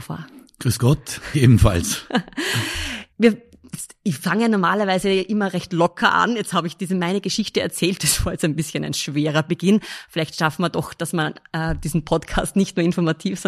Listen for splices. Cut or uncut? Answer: cut